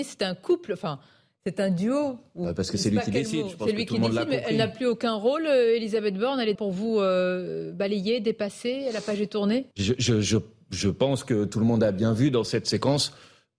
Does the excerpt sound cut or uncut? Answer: cut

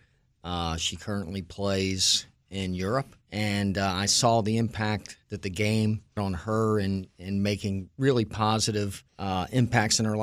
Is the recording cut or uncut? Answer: cut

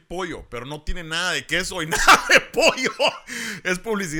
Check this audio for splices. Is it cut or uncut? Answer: uncut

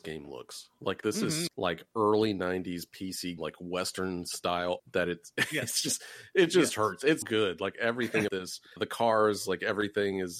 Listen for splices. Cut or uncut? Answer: cut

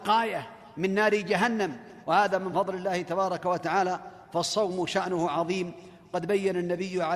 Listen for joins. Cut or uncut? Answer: uncut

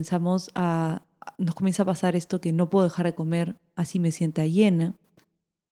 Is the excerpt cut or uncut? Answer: uncut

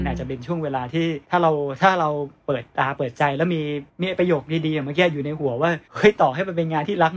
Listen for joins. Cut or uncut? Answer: cut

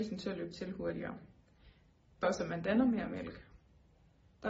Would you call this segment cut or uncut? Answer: cut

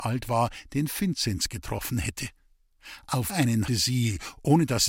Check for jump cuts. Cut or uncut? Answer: cut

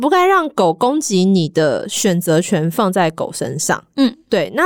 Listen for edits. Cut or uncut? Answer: uncut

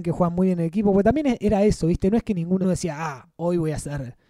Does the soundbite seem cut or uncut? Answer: cut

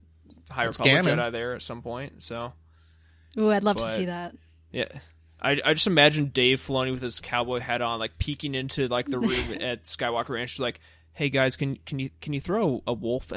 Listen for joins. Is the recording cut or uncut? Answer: uncut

